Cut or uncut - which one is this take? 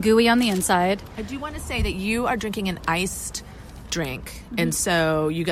uncut